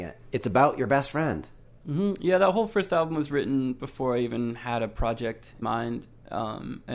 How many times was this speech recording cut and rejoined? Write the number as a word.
one